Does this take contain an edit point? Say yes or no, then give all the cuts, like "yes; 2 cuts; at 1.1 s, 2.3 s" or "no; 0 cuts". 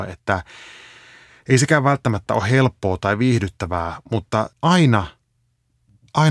yes; 1 cut; at 4.5 s